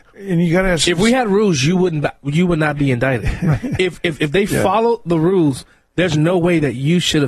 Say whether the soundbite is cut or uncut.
uncut